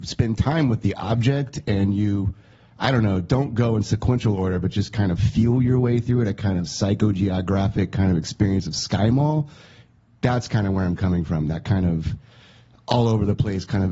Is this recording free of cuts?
yes; 0 cuts

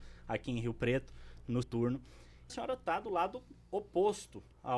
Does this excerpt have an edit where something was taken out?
yes; 2 cuts; at 1.6 s, 2.5 s

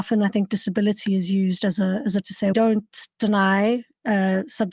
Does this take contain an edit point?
yes; 2 cuts; at 2.2 s, 2.5 s

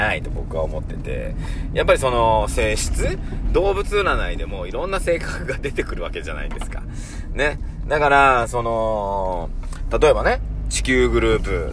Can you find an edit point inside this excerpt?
no; 0 cuts

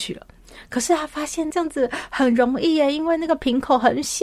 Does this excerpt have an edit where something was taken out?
yes; 1 cut; at 1.5 s

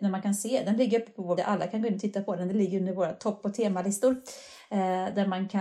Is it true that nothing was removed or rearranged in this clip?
no; 1 cut; at 1.4 s

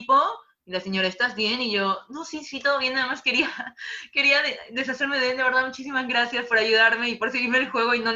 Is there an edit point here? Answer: no; 0 cuts

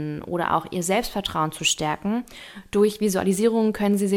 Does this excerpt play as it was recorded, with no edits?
yes; 0 cuts

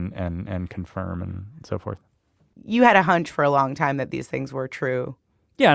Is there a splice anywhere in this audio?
no; 0 cuts

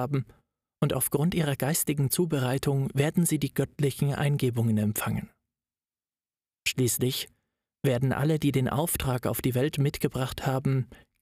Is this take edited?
no; 0 cuts

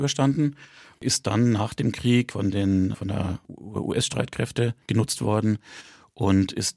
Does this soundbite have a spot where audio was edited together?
yes; 1 cut; at 4.8 s

